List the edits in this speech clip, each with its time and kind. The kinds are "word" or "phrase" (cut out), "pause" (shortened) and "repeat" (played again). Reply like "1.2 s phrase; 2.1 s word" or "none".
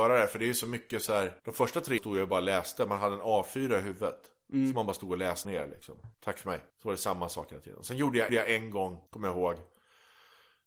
1.4 s pause; 2.0 s word; 5.4 s phrase; 6.1 s pause; 6.7 s pause; 8.3 s repeat; 9.1 s pause